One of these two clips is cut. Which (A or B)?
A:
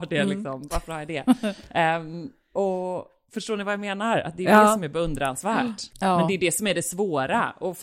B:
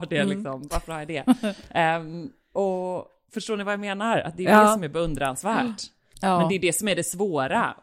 A